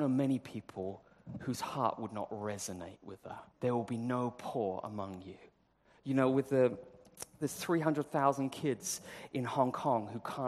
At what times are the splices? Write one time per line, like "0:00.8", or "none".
0:03.5
0:07.3